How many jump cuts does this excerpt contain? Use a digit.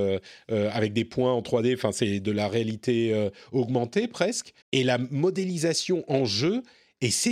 1